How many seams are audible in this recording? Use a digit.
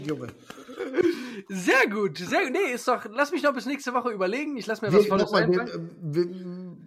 1